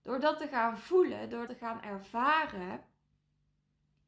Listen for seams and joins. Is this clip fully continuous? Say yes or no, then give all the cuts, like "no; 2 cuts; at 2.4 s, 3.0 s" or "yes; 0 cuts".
no; 1 cut; at 1.5 s